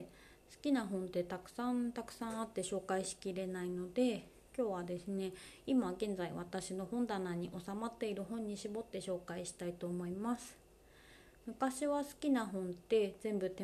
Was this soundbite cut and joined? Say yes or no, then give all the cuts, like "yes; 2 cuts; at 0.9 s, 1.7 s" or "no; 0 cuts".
no; 0 cuts